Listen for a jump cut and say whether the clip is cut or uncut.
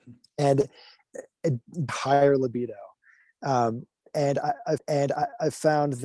cut